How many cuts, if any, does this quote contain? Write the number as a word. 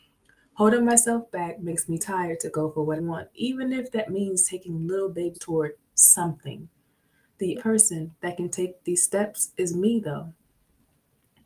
four